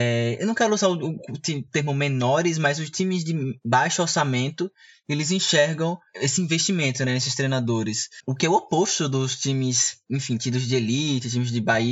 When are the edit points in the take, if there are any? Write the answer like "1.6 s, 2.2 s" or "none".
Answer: none